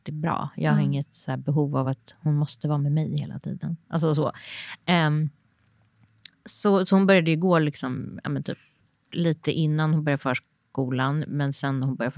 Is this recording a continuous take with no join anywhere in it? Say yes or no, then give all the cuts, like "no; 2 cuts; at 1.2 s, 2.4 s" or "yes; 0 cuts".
yes; 0 cuts